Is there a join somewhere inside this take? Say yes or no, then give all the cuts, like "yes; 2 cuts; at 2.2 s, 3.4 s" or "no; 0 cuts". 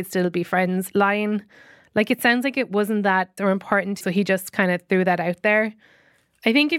yes; 2 cuts; at 3.4 s, 4.0 s